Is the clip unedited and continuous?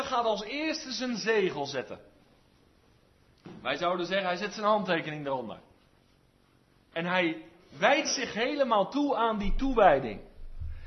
yes; 0 cuts

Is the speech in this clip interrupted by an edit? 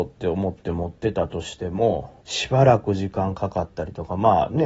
yes; 1 cut; at 2.2 s

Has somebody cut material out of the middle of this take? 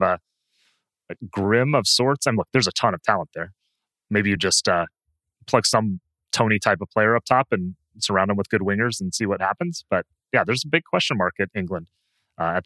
no; 0 cuts

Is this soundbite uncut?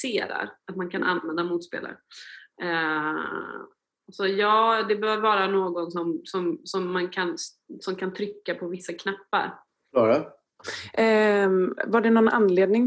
yes; 0 cuts

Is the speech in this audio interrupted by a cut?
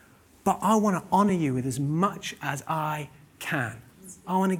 no; 0 cuts

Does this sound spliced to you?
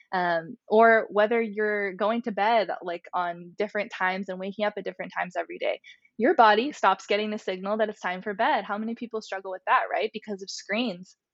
no; 0 cuts

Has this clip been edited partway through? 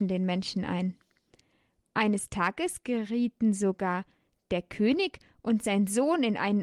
no; 0 cuts

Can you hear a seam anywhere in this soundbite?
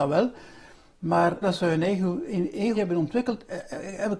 yes; 2 cuts; at 1.4 s, 2.7 s

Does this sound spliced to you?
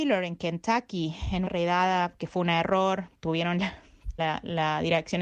yes; 2 cuts; at 1.5 s, 4.2 s

